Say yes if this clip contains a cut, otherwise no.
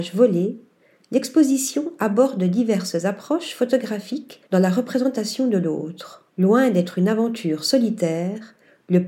yes